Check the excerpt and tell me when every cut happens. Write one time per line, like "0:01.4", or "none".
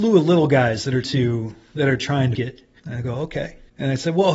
0:01.0
0:02.3